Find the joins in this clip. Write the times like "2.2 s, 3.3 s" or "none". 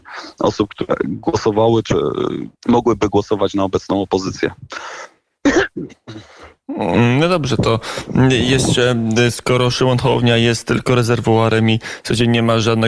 2.6 s